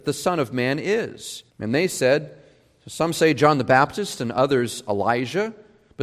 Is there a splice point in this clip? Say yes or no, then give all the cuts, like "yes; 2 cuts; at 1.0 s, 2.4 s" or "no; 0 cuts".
yes; 1 cut; at 1.5 s